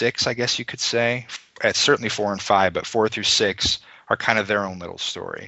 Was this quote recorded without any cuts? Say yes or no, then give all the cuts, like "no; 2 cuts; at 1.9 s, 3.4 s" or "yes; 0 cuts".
yes; 0 cuts